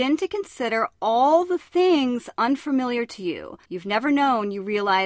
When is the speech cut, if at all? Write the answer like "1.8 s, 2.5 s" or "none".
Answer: 3.7 s